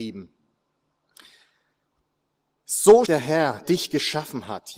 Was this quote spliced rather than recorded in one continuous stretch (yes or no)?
yes